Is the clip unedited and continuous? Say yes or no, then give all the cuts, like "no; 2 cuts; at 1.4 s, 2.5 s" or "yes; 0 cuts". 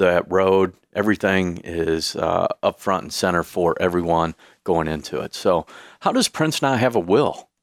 yes; 0 cuts